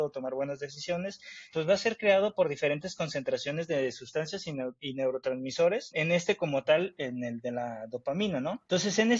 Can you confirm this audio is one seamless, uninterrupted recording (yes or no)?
no